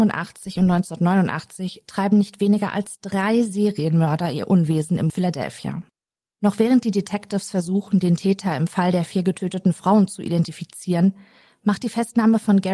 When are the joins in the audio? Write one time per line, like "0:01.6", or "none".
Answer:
none